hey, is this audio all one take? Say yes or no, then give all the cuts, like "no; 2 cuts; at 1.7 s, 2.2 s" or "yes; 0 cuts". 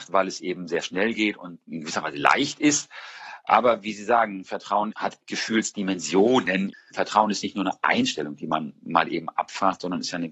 yes; 0 cuts